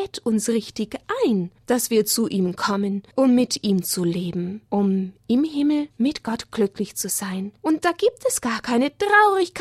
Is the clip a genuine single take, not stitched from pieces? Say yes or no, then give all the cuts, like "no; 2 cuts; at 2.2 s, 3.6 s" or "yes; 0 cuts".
no; 5 cuts; at 1.6 s, 3.1 s, 4.7 s, 5.9 s, 7.6 s